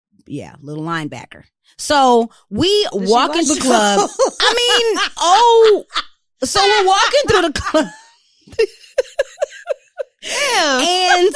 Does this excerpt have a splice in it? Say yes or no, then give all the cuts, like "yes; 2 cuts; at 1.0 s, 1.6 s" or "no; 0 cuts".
yes; 3 cuts; at 2.9 s, 3.5 s, 5.2 s